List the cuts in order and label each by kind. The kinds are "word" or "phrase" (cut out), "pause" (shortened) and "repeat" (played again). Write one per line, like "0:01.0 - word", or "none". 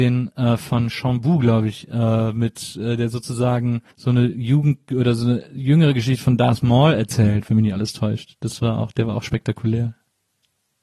0:03.9 - pause